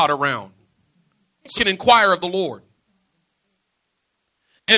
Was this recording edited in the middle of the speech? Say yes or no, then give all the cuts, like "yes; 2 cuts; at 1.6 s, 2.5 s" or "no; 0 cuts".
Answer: yes; 1 cut; at 1.5 s